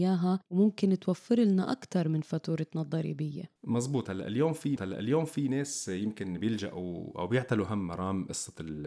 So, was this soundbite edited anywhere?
yes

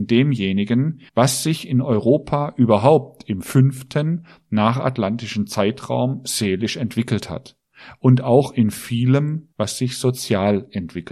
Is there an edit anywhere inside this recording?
yes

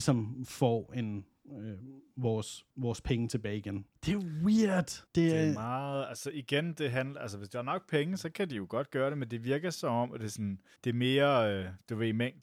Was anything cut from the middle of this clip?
yes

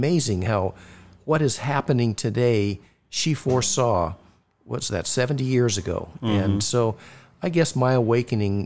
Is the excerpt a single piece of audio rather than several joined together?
yes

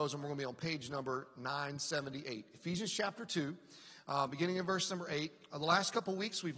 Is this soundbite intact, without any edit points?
yes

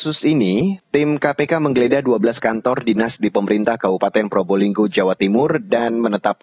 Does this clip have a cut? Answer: no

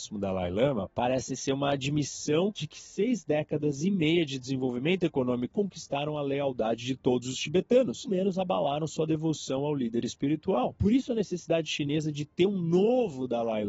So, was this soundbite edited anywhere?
yes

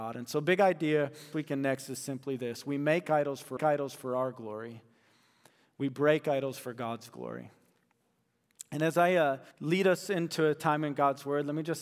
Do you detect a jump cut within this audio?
yes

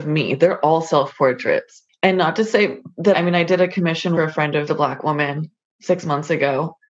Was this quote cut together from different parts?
yes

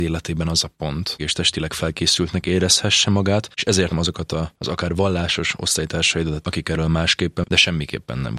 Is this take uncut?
no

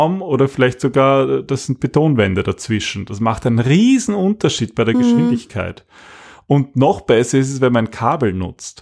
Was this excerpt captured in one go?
yes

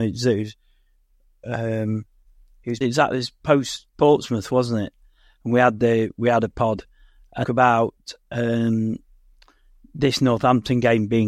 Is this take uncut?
no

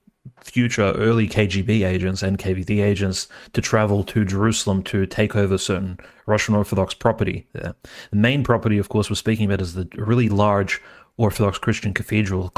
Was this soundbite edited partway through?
no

